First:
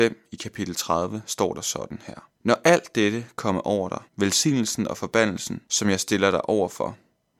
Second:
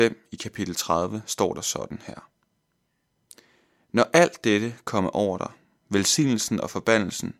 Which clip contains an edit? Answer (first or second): first